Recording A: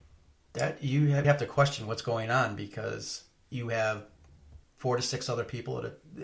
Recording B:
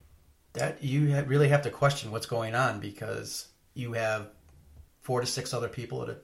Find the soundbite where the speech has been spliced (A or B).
A